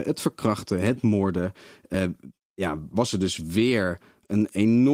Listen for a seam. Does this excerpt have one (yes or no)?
no